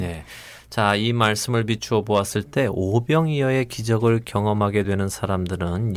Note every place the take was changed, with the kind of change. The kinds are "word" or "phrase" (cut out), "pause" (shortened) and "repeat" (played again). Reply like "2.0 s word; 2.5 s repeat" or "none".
none